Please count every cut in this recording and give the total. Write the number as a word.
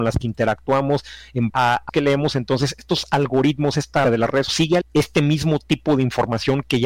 five